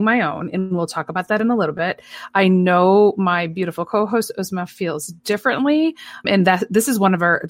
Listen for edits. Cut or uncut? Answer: cut